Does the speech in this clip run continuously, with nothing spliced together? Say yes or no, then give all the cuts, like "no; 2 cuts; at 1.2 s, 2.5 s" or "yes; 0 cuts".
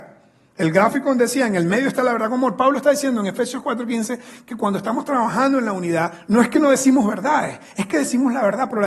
yes; 0 cuts